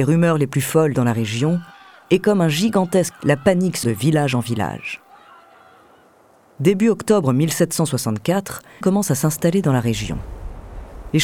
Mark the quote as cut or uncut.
cut